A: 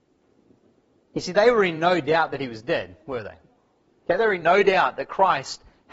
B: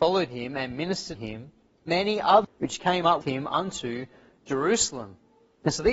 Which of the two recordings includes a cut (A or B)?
B